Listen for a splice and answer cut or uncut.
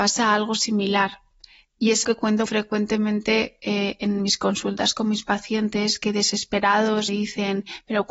cut